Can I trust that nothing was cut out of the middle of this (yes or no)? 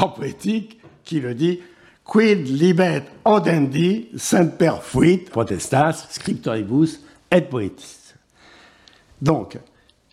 no